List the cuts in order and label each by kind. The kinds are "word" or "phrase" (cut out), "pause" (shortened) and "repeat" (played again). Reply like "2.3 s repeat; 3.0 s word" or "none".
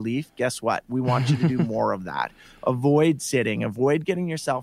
none